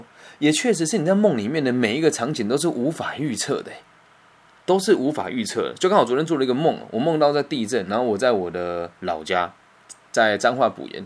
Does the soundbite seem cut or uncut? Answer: uncut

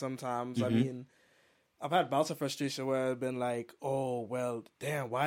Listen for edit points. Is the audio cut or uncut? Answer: uncut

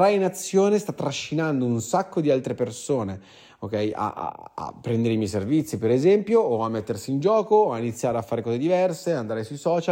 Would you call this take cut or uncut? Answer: uncut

